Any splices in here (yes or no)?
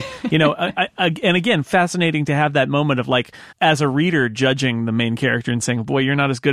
yes